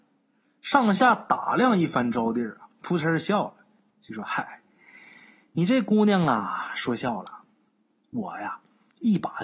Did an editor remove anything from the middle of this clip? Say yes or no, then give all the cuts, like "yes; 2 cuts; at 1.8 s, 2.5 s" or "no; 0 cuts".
no; 0 cuts